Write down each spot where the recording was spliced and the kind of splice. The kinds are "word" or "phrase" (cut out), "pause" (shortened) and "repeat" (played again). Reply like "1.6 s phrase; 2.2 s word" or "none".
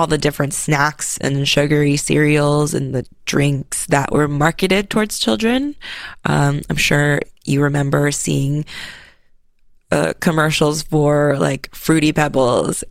none